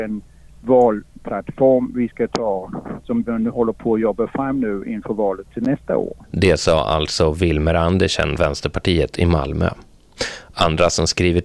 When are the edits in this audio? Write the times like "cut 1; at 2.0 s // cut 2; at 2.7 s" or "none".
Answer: cut 1; at 6.2 s // cut 2; at 8.4 s